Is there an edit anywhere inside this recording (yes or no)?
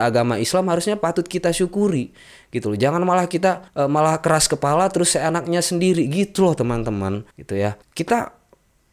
yes